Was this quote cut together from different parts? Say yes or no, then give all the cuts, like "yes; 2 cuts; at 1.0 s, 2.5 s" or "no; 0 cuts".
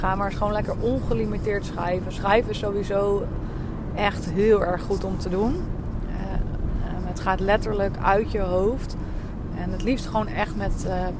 no; 0 cuts